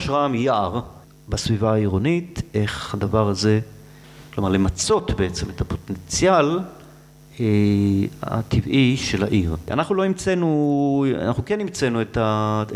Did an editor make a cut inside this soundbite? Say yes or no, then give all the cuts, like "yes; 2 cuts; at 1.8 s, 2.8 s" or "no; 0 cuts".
no; 0 cuts